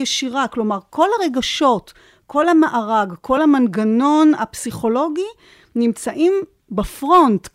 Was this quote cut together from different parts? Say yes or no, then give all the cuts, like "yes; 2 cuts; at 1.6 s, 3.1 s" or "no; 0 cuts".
no; 0 cuts